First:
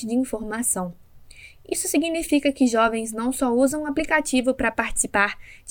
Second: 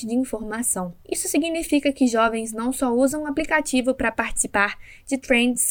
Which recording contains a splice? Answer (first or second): second